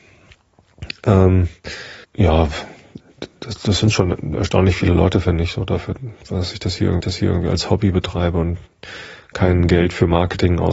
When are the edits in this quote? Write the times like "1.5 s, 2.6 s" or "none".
2.0 s, 7.0 s